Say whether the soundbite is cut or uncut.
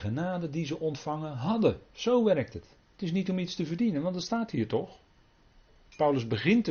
cut